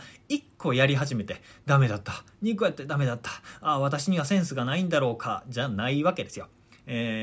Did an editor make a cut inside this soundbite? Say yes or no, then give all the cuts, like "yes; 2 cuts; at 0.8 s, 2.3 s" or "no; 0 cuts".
no; 0 cuts